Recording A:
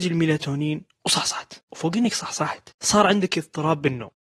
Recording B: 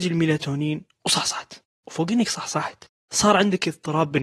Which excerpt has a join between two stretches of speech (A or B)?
A